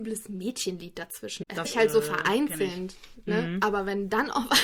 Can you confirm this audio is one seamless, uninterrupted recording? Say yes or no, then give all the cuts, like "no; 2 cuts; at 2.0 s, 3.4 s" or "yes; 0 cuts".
no; 1 cut; at 1.6 s